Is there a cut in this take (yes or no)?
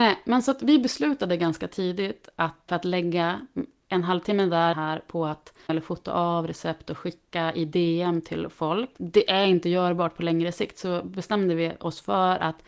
yes